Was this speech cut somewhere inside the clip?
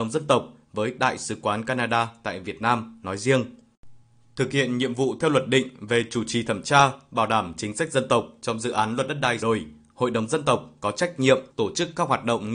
yes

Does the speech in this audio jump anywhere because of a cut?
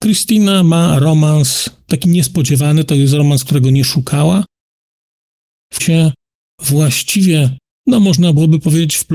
yes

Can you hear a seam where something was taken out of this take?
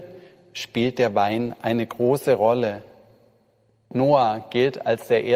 no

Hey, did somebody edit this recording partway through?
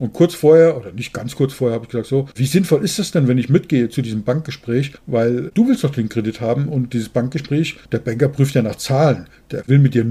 yes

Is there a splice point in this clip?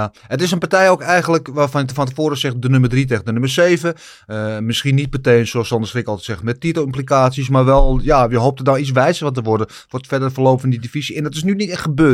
no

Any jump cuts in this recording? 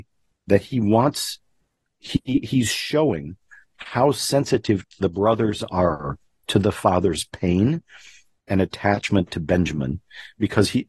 no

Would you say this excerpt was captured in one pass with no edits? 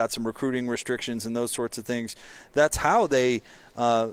yes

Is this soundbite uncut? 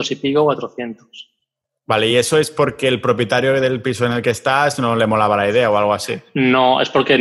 yes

